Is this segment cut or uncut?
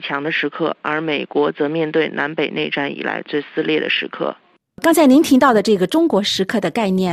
uncut